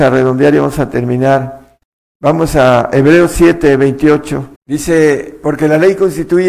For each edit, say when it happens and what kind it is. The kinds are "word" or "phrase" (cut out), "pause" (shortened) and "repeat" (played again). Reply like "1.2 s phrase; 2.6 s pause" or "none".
4.6 s pause